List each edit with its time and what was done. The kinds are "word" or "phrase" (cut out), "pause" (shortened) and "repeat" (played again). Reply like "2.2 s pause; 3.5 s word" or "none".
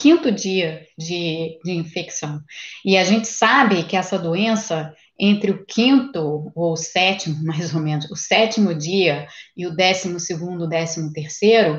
none